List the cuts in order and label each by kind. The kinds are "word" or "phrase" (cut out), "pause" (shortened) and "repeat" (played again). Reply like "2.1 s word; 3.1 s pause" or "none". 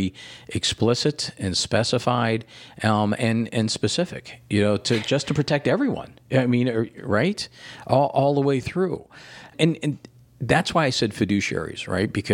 6.2 s pause